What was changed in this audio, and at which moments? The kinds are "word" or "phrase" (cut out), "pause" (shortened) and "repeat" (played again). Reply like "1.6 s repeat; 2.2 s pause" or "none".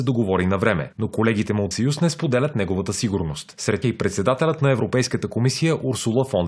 1.7 s word; 3.8 s word